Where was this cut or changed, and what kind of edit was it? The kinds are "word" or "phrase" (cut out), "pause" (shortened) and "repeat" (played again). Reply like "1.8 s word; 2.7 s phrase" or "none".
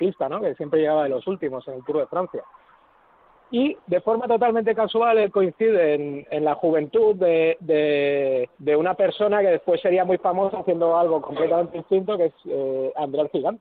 3.8 s pause; 8.5 s pause